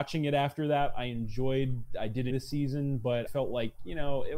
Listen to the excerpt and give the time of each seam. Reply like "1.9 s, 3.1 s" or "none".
2.3 s, 3.3 s